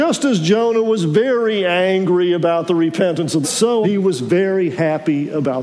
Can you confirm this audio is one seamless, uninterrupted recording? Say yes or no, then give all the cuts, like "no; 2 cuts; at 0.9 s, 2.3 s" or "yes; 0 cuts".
no; 2 cuts; at 3.4 s, 3.8 s